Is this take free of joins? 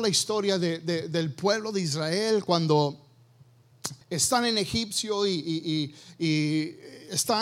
no; 1 cut; at 4.0 s

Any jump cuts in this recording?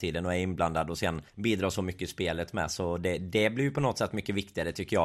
yes; 1 cut; at 1.3 s

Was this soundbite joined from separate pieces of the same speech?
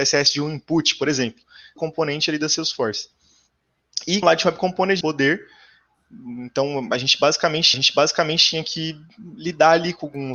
yes; 4 cuts; at 1.8 s, 4.2 s, 5.0 s, 7.7 s

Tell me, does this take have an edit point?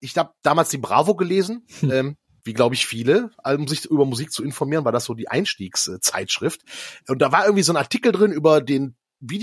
no; 0 cuts

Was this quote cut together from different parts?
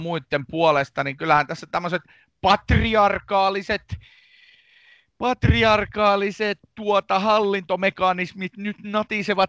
no; 0 cuts

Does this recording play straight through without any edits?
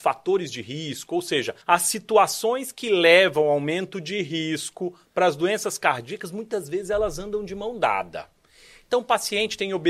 no; 1 cut; at 1.6 s

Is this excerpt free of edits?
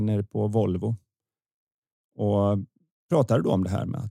yes; 0 cuts

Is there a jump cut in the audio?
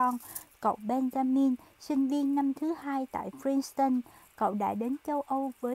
no; 0 cuts

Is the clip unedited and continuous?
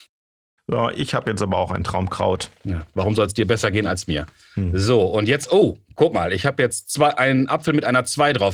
yes; 0 cuts

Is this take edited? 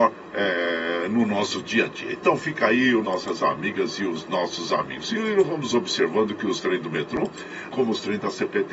yes; 2 cuts; at 3.0 s, 7.7 s

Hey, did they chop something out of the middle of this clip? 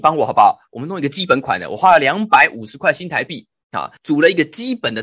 yes; 1 cut; at 4.0 s

